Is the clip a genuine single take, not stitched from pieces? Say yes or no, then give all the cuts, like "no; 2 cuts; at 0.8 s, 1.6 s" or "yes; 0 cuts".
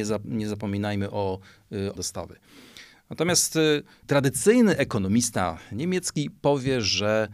no; 2 cuts; at 1.9 s, 4.0 s